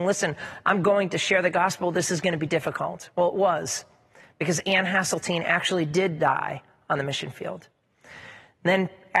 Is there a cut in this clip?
no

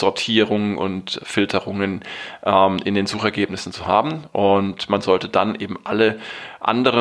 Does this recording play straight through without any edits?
yes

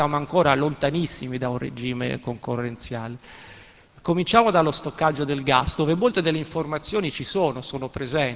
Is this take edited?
no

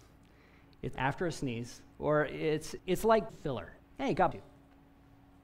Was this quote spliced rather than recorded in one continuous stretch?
yes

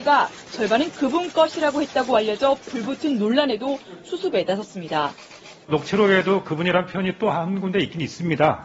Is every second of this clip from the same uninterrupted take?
yes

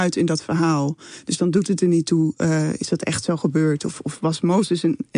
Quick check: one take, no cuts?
yes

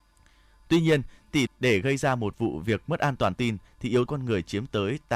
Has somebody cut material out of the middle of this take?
yes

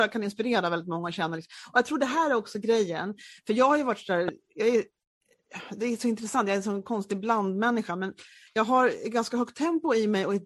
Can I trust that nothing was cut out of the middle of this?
yes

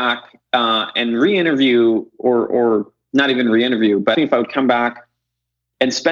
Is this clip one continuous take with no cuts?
no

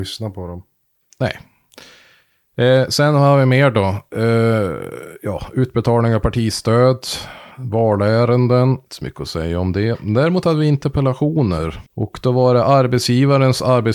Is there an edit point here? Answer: yes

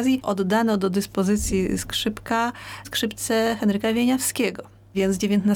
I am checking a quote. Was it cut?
yes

